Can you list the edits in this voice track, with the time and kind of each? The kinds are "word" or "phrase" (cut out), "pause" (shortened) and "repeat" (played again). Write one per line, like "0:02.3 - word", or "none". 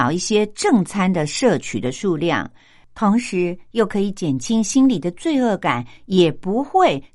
none